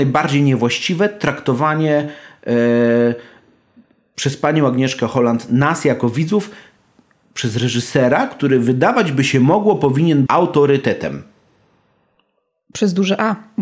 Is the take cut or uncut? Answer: cut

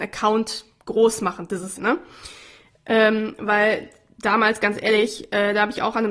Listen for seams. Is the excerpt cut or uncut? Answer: cut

